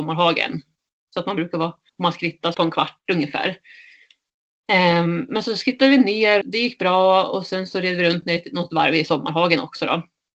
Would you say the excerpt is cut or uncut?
cut